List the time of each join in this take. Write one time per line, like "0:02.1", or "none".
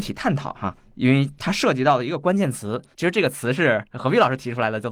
0:02.9